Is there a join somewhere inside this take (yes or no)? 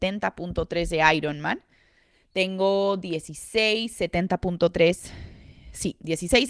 no